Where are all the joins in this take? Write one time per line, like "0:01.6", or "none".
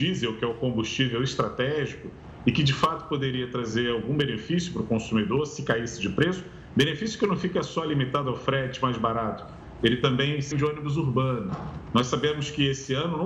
0:10.5